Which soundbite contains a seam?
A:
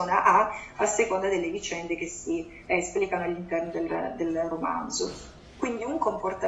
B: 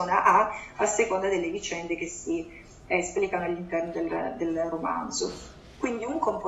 A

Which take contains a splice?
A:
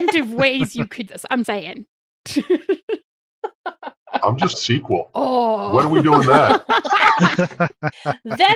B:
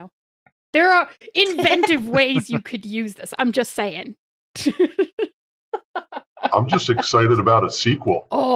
A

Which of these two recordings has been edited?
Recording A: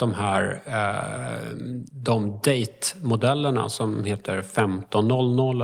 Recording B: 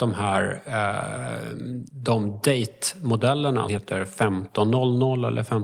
B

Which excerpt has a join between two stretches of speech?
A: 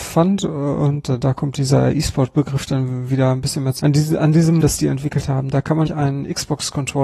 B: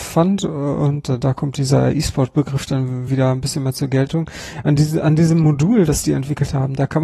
A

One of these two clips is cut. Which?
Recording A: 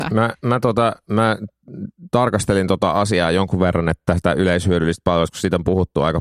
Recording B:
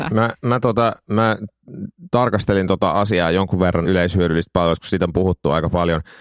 B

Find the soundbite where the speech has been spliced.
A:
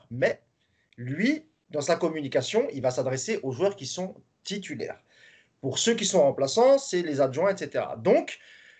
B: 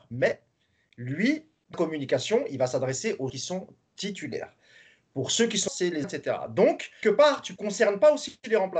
B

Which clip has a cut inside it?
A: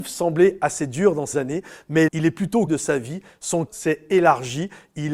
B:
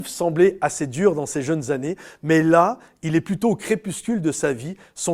A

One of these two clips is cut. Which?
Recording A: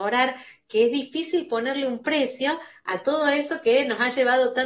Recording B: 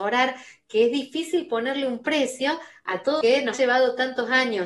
B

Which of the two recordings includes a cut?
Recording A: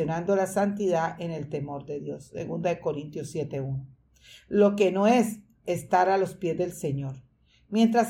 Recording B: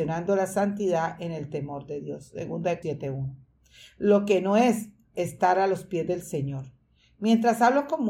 B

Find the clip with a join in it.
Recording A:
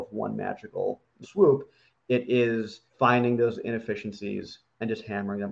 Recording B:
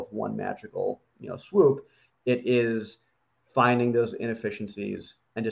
A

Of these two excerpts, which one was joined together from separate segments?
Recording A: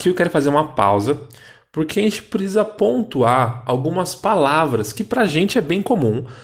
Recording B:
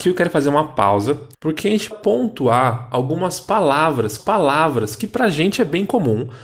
B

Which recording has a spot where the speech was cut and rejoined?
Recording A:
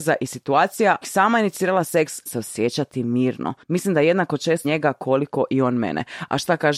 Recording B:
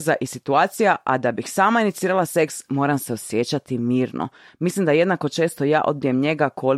A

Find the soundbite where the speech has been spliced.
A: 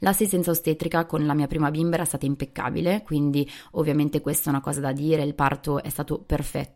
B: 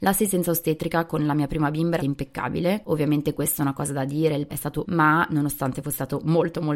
B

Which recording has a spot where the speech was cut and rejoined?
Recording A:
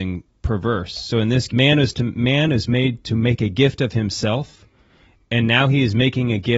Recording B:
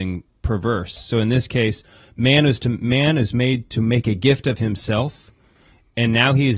A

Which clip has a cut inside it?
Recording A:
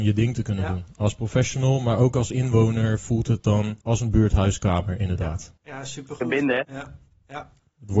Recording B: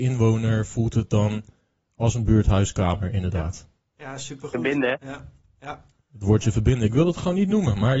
A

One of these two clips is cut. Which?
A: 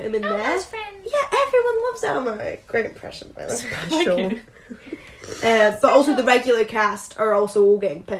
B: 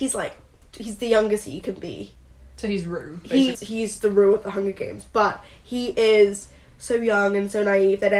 B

